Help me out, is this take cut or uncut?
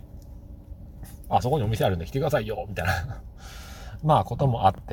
uncut